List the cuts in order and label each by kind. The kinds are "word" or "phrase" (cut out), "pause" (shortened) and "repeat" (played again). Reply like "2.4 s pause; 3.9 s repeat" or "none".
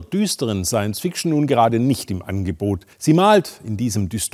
2.9 s pause